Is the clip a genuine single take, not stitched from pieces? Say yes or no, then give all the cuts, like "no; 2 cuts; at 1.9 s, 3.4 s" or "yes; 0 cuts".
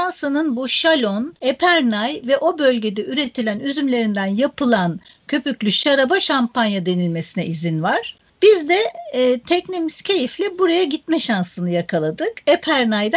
yes; 0 cuts